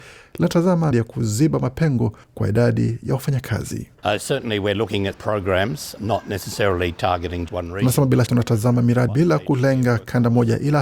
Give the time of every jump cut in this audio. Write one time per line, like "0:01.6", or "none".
0:00.9
0:02.2
0:03.9
0:05.1
0:06.0
0:07.5
0:08.3
0:09.1